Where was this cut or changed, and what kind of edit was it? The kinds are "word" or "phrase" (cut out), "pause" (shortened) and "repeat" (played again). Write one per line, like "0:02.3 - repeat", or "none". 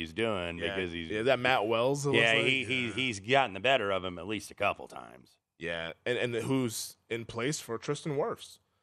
none